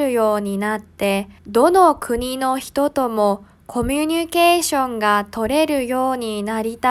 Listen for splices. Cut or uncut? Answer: cut